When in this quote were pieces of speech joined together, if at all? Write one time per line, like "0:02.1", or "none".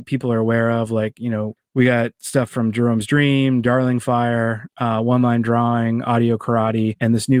none